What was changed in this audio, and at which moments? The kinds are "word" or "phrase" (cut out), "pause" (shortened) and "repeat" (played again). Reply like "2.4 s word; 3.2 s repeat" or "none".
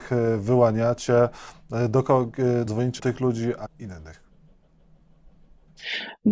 2.7 s word; 3.0 s word; 3.6 s word